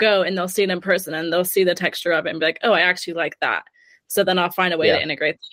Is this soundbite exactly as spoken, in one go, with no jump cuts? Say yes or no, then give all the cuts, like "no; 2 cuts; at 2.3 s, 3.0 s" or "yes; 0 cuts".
yes; 0 cuts